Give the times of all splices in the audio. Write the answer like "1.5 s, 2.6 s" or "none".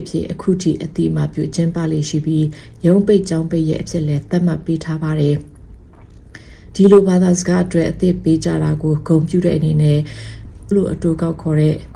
10.7 s